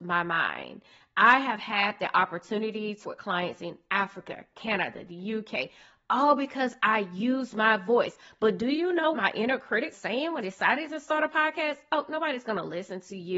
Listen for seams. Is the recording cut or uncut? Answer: cut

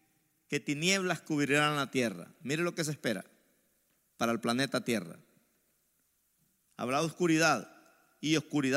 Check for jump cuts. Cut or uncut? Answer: uncut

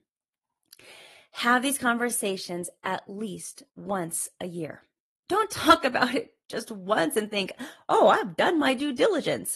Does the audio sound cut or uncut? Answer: cut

